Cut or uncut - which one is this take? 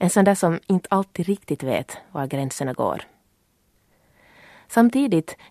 uncut